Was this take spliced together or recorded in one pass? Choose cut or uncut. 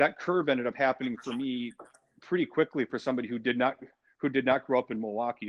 uncut